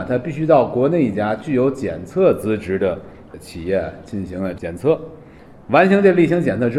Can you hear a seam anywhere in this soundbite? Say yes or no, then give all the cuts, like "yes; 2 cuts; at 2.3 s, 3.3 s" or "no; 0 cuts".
no; 0 cuts